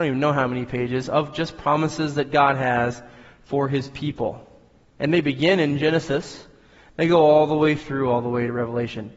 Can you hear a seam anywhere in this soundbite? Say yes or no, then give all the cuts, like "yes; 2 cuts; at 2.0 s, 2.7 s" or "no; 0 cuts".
no; 0 cuts